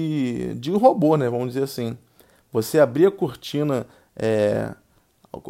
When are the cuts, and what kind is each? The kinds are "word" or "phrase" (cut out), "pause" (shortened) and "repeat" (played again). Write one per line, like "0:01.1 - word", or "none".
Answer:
none